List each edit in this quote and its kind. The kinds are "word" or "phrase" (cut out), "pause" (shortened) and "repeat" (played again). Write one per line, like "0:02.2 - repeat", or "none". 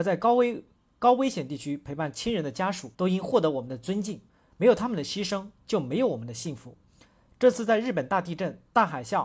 0:02.9 - pause